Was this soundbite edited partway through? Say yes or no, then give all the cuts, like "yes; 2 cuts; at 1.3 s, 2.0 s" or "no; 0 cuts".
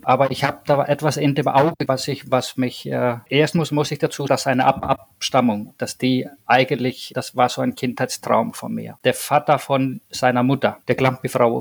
yes; 3 cuts; at 1.9 s, 4.3 s, 7.1 s